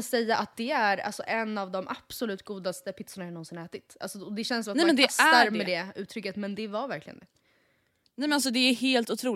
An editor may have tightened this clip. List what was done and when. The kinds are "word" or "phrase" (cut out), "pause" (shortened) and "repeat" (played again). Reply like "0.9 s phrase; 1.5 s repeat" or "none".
none